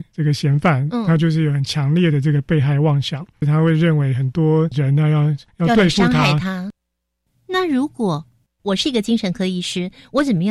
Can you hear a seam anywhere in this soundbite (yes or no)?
no